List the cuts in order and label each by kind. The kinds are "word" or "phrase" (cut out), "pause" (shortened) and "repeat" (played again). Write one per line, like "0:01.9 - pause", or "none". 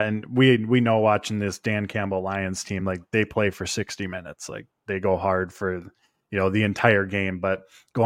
none